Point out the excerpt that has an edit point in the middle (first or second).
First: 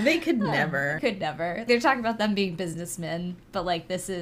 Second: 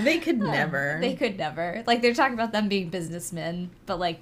first